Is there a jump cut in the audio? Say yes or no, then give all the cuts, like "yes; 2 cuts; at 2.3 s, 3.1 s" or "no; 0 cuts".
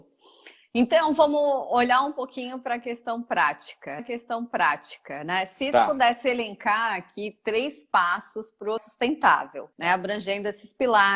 yes; 3 cuts; at 4.0 s, 8.8 s, 9.7 s